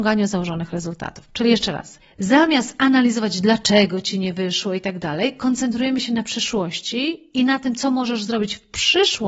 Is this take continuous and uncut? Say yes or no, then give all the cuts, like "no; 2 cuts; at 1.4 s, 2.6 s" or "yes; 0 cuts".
yes; 0 cuts